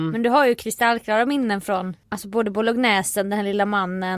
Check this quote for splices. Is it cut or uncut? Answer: uncut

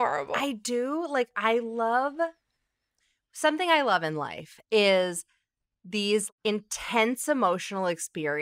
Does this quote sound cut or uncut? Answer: uncut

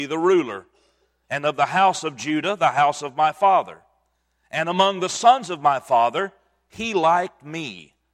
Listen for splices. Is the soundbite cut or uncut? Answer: uncut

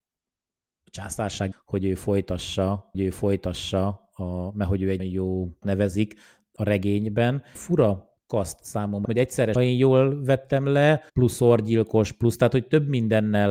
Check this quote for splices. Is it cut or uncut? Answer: cut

